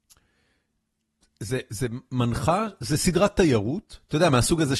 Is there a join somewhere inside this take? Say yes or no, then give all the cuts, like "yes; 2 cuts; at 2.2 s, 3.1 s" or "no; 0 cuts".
no; 0 cuts